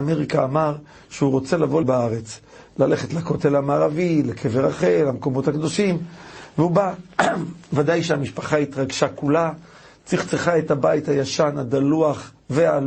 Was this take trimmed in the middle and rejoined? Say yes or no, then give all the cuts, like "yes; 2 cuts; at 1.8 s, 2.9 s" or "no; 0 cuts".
yes; 1 cut; at 1.8 s